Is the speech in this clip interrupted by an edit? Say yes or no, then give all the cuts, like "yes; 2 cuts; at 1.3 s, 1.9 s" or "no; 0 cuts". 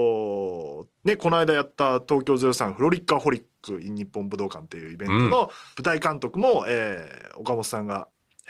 yes; 2 cuts; at 1.0 s, 5.7 s